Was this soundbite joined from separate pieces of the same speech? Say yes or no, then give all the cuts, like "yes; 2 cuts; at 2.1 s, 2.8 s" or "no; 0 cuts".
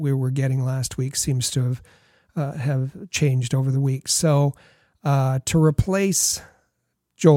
no; 0 cuts